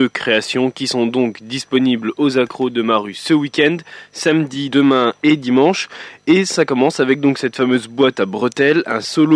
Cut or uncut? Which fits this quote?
cut